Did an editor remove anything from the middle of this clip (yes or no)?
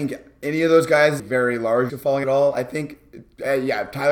yes